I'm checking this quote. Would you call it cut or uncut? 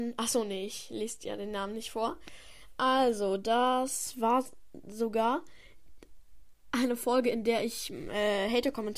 uncut